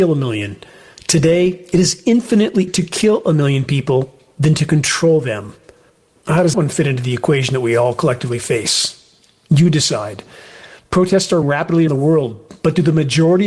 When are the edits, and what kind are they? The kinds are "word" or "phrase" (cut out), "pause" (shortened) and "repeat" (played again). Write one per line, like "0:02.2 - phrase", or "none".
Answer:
0:02.7 - word
0:06.5 - word
0:11.4 - word
0:11.9 - word